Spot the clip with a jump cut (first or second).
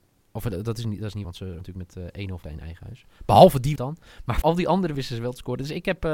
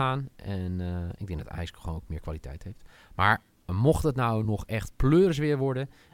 first